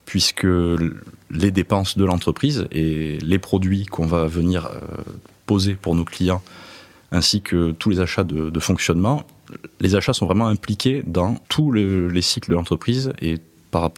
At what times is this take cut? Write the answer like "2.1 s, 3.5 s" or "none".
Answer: 11.4 s